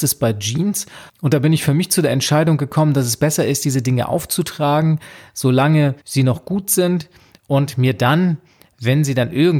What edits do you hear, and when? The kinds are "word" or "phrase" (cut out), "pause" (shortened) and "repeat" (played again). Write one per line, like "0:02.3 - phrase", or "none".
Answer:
0:01.1 - pause
0:06.0 - pause